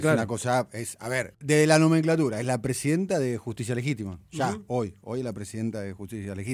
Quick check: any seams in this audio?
no; 0 cuts

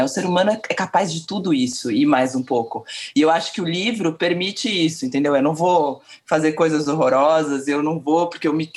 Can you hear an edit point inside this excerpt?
no; 0 cuts

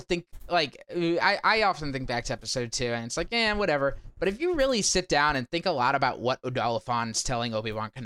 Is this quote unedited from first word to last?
yes; 0 cuts

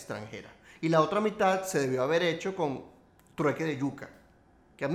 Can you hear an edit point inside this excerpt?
no; 0 cuts

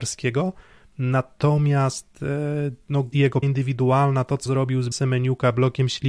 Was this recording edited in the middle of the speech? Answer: yes; 4 cuts; at 3.1 s, 3.4 s, 4.5 s, 4.9 s

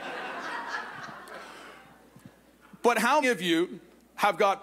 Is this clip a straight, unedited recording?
no; 1 cut; at 3.2 s

